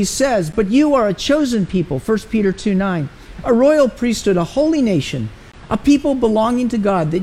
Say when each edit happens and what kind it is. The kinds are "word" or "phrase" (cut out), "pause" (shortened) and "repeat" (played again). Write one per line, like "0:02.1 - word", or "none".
none